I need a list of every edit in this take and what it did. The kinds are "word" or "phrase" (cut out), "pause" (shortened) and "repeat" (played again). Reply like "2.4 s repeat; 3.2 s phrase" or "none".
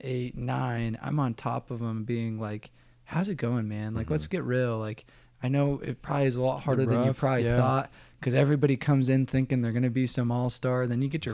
none